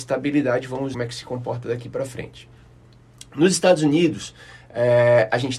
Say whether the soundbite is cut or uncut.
cut